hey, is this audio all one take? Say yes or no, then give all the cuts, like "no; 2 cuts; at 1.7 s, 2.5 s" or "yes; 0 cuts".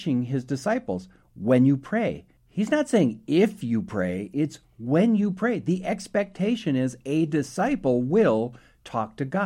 yes; 0 cuts